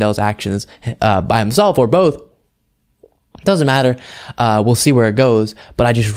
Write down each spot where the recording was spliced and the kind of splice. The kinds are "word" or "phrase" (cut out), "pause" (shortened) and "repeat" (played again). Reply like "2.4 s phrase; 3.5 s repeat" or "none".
none